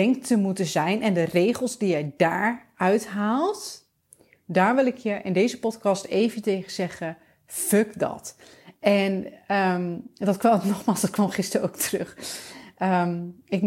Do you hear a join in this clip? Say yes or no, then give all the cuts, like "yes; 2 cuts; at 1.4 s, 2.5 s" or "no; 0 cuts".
no; 0 cuts